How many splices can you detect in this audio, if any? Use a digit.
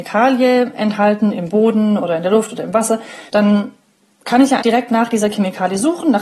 2